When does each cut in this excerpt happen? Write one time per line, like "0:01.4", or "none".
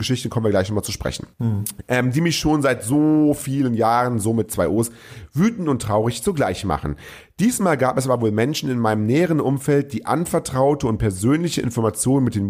0:01.3